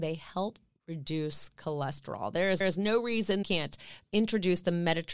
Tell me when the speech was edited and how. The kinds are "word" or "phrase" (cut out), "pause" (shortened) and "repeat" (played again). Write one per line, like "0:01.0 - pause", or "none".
0:02.6 - repeat
0:03.4 - phrase